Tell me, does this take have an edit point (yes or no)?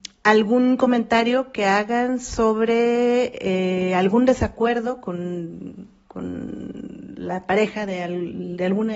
no